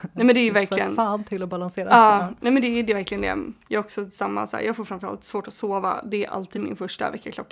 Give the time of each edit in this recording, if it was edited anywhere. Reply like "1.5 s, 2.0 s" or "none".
none

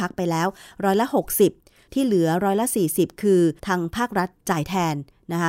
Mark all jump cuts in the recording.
3.6 s

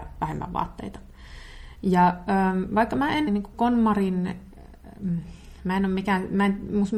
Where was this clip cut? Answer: 3.3 s

